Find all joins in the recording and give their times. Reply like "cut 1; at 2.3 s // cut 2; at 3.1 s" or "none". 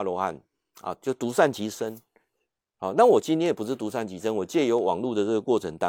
none